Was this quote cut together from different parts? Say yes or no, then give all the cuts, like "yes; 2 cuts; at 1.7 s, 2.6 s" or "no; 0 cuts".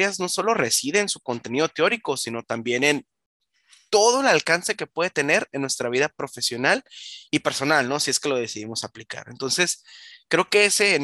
no; 0 cuts